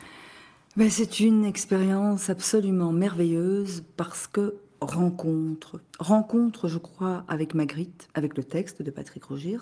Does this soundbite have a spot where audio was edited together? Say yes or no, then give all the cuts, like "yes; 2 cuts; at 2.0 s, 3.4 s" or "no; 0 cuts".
yes; 2 cuts; at 5.9 s, 8.1 s